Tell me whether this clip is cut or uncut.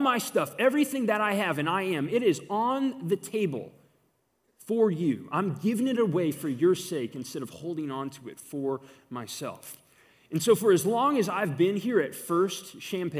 uncut